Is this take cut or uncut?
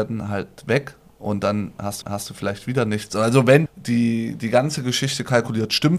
cut